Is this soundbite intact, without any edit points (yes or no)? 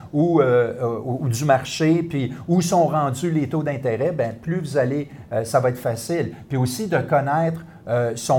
yes